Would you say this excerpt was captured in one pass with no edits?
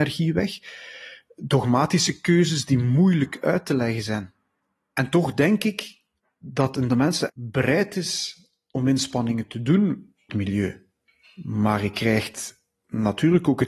no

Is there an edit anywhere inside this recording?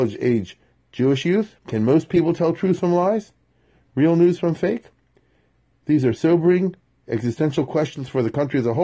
yes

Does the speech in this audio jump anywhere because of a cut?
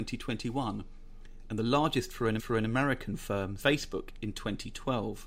yes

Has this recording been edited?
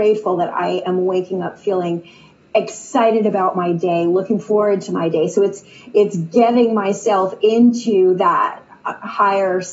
no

